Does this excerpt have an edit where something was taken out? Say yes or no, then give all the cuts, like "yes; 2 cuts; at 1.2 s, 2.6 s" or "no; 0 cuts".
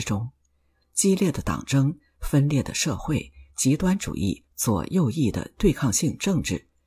no; 0 cuts